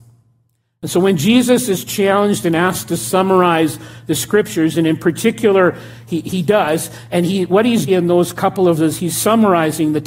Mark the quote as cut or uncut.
cut